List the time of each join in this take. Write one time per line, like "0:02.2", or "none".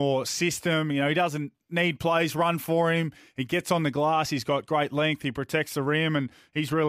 none